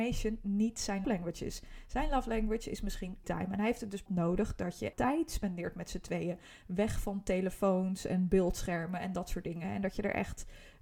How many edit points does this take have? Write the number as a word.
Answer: four